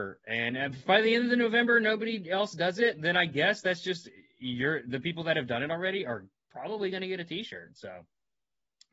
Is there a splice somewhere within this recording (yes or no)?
no